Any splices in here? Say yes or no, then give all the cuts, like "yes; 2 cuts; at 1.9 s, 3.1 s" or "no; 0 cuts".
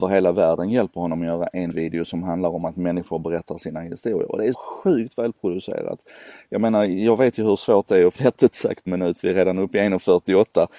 yes; 4 cuts; at 1.7 s, 4.5 s, 8.2 s, 8.9 s